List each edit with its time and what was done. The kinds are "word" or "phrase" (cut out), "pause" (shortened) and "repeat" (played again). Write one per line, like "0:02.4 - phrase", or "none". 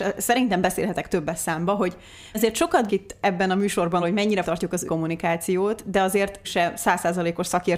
0:02.3 - word
0:02.9 - word
0:04.0 - word
0:04.4 - word
0:04.9 - word
0:06.4 - word